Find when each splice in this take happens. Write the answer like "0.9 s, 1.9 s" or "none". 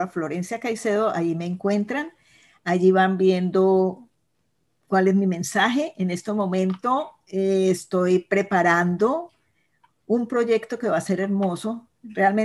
none